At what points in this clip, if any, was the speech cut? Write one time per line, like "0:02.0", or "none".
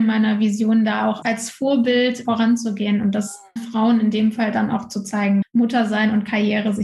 0:01.2
0:02.2
0:03.6
0:05.4